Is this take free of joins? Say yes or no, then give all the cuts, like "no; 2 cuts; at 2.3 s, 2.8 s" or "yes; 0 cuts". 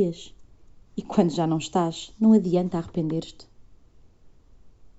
yes; 0 cuts